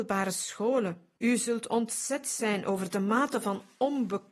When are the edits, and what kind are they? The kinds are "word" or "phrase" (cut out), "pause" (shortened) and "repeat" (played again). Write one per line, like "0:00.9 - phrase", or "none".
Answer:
0:01.2 - pause